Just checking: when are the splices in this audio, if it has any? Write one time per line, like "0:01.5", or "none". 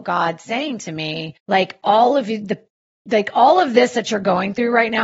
0:01.4